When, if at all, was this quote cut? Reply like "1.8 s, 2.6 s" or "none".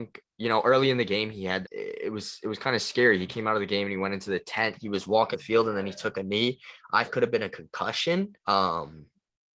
1.6 s, 5.3 s, 7.1 s, 8.4 s